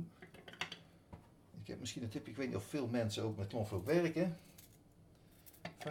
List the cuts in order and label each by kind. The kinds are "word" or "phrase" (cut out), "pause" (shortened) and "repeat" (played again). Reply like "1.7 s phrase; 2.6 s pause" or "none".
none